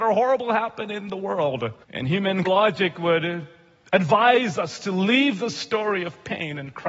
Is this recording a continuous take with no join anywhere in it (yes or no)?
no